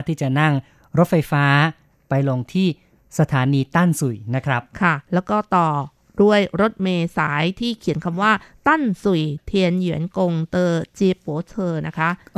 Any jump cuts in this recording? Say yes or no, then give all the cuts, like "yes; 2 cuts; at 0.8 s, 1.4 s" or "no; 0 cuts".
no; 0 cuts